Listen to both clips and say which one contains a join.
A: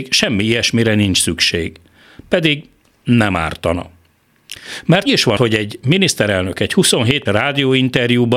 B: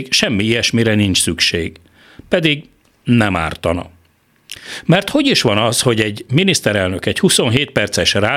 A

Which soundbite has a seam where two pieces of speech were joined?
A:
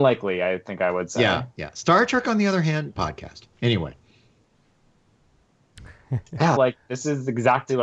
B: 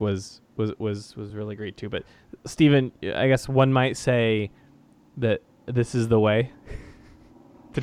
A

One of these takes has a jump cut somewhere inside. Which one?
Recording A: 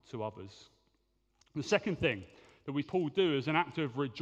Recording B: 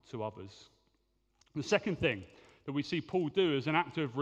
A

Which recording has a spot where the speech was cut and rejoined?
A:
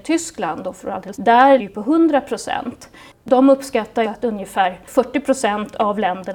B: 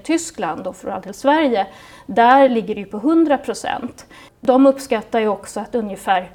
A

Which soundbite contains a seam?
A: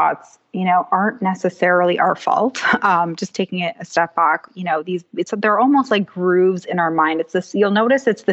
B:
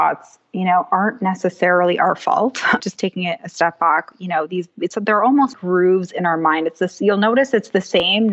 B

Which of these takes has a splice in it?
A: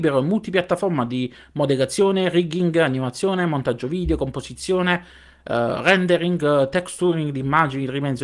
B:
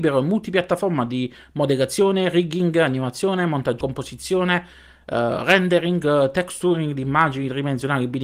B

